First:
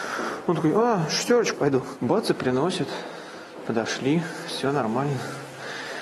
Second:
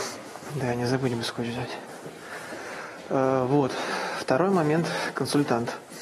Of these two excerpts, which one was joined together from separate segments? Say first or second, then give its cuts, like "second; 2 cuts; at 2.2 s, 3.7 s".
first; 1 cut; at 1.5 s